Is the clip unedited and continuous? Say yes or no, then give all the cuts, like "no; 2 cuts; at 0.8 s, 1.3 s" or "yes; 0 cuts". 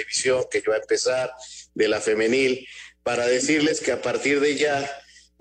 yes; 0 cuts